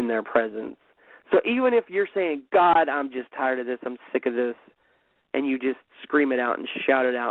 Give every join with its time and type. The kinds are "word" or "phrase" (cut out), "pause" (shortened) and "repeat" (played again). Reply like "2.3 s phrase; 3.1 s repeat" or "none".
none